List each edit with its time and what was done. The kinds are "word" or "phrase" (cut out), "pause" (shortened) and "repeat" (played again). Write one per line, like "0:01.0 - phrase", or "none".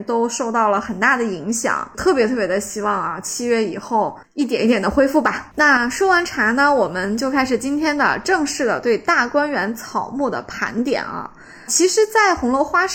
none